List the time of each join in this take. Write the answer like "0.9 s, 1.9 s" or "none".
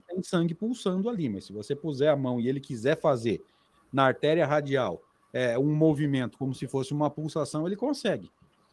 none